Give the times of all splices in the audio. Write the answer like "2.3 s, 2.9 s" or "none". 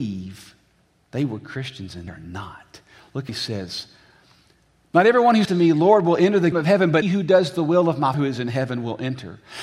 2.1 s, 3.3 s, 5.4 s, 6.5 s, 7.0 s, 8.1 s